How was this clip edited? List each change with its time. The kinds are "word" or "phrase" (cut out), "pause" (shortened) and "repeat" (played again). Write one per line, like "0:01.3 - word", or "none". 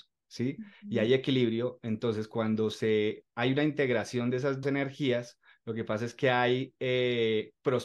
0:04.6 - word